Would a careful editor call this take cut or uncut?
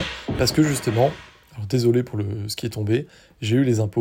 uncut